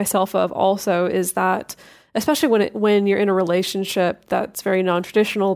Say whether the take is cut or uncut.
uncut